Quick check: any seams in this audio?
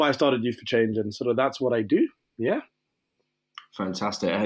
no; 0 cuts

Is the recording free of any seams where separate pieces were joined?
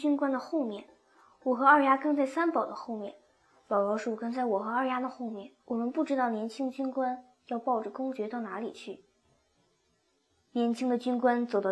no; 1 cut; at 5.6 s

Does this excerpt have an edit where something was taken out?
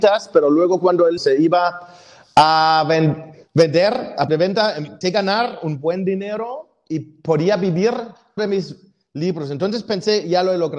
yes; 4 cuts; at 1.2 s, 4.3 s, 5.0 s, 8.4 s

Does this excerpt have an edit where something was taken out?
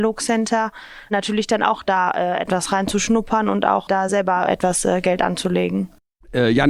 no; 0 cuts

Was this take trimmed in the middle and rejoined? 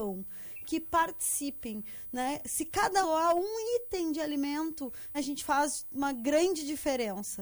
yes; 2 cuts; at 3.0 s, 5.1 s

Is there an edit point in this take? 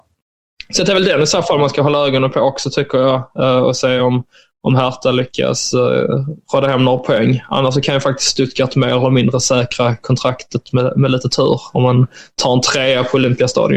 no; 0 cuts

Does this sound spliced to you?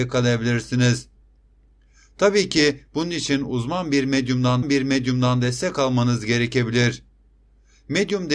yes; 1 cut; at 4.6 s

